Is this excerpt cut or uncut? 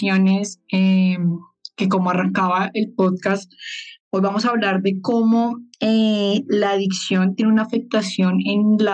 cut